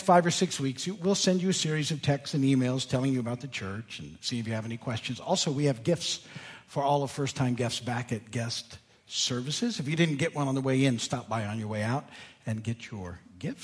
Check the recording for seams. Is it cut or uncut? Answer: uncut